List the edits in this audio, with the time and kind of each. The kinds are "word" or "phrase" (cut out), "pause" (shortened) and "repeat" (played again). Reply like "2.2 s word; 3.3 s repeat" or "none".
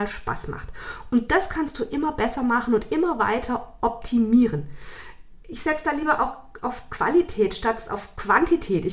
none